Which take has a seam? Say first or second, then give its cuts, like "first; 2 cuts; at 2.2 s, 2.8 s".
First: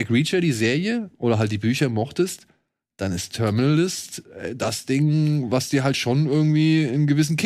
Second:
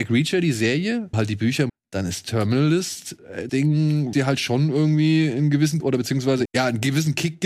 second; 6 cuts; at 1.1 s, 1.7 s, 3.5 s, 4.1 s, 5.8 s, 6.5 s